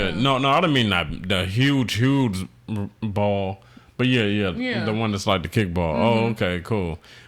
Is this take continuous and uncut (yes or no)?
yes